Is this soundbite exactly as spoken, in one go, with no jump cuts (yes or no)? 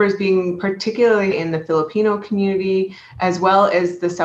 no